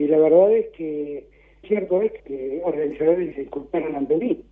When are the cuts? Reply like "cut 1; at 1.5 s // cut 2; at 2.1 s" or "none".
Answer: cut 1; at 1.6 s // cut 2; at 2.2 s // cut 3; at 3.3 s